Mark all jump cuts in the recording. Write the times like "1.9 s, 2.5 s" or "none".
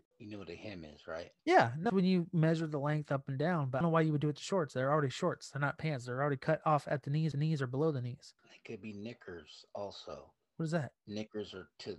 1.4 s, 1.9 s, 3.8 s, 7.3 s, 8.4 s, 11.0 s